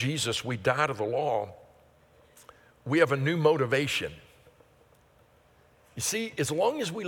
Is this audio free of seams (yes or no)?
yes